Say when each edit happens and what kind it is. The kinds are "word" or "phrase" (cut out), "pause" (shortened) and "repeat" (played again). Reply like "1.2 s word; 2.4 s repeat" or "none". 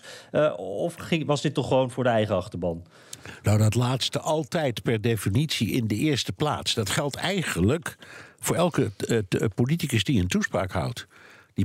none